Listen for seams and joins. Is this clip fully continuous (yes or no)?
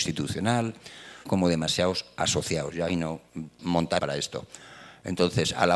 no